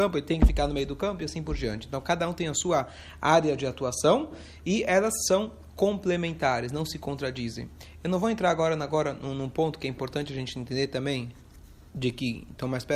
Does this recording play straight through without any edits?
yes; 0 cuts

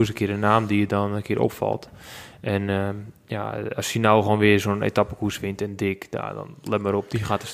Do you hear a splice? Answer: no; 0 cuts

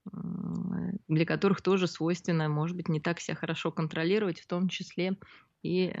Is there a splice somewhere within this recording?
yes; 1 cut; at 1.0 s

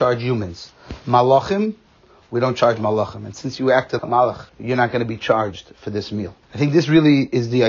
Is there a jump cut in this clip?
yes; 3 cuts; at 4.0 s, 4.5 s, 6.4 s

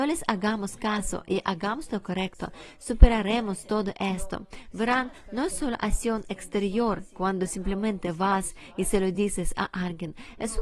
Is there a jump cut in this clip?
no; 0 cuts

